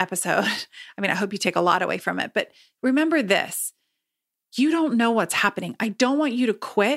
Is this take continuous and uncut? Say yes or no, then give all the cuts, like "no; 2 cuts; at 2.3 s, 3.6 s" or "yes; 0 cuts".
yes; 0 cuts